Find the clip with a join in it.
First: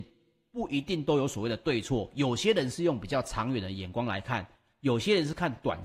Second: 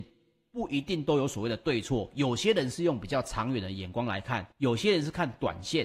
second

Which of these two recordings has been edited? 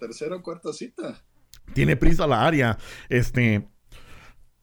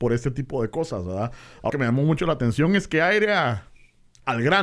second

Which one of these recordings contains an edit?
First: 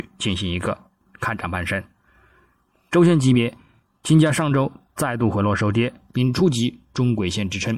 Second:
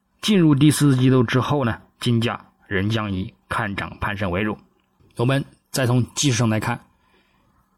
second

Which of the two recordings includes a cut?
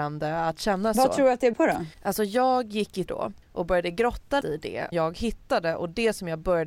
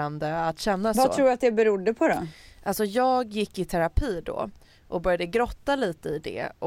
first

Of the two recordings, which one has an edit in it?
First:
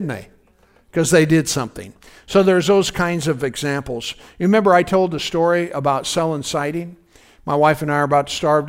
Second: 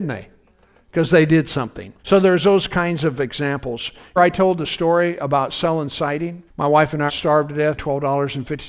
second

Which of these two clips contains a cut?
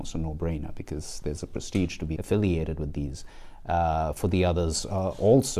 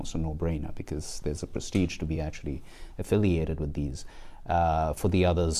first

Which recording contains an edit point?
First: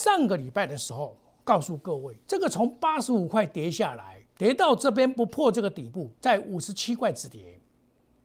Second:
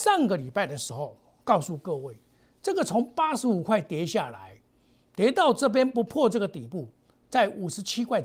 first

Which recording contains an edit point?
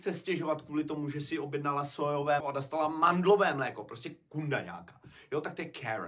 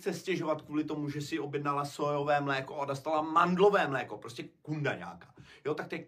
first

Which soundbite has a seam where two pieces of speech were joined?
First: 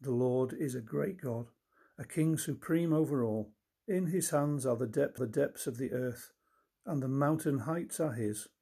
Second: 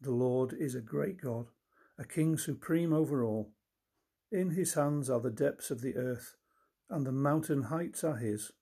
first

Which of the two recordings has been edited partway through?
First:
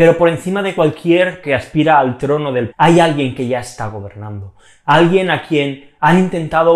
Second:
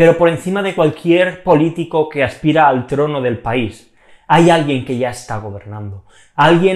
first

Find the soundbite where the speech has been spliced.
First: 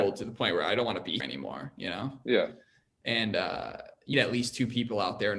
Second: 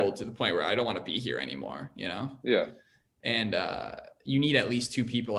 first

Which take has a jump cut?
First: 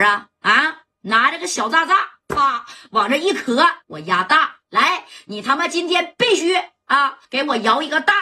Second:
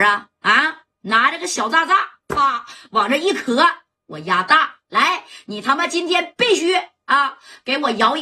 first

